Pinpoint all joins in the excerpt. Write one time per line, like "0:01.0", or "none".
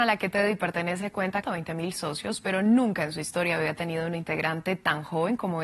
0:01.4